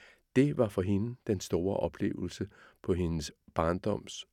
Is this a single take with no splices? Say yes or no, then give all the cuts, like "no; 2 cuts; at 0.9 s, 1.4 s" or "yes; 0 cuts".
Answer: yes; 0 cuts